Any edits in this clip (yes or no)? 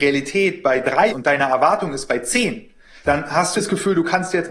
yes